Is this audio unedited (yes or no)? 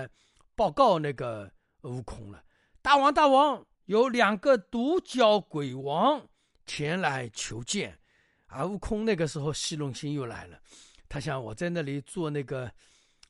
no